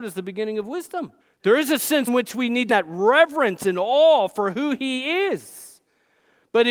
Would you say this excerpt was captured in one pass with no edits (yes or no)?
no